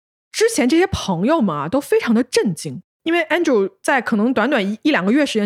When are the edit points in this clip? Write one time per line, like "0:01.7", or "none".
none